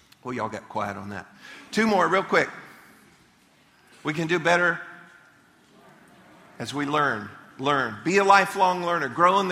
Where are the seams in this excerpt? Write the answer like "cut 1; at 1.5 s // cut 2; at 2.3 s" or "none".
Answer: none